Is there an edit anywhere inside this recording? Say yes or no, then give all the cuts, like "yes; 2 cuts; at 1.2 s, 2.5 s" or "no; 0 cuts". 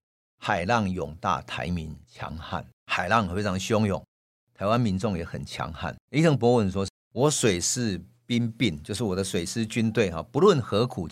yes; 2 cuts; at 2.8 s, 6.0 s